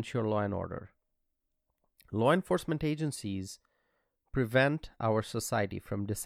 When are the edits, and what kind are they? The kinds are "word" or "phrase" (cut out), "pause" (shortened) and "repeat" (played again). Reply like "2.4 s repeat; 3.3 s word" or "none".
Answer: none